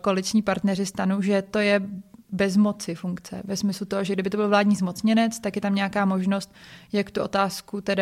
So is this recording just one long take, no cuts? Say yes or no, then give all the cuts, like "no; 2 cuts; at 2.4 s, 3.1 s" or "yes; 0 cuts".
yes; 0 cuts